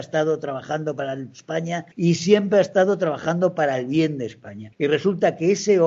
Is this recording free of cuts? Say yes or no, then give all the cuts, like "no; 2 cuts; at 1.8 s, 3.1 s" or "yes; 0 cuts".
no; 2 cuts; at 1.9 s, 4.7 s